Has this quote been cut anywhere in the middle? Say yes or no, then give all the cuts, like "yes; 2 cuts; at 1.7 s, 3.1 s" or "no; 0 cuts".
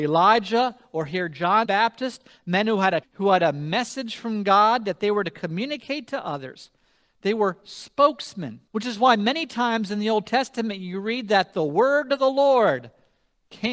yes; 3 cuts; at 1.6 s, 3.0 s, 8.7 s